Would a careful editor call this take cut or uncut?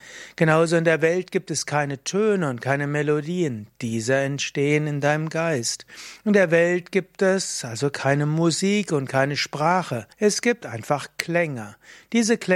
cut